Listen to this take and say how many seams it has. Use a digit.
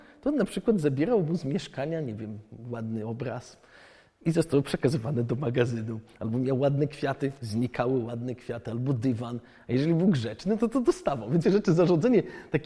1